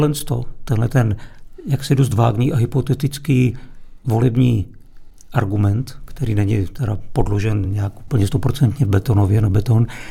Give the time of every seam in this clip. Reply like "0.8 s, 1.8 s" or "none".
none